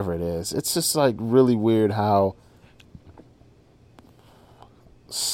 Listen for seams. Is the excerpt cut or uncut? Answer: uncut